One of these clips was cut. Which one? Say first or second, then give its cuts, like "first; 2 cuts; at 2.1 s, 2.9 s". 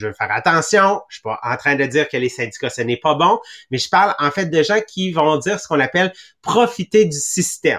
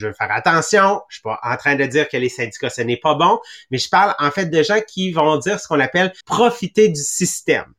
second; 1 cut; at 6.2 s